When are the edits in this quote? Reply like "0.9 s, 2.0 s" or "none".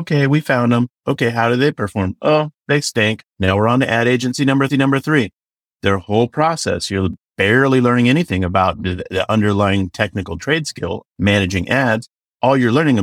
3.3 s, 4.7 s, 11.0 s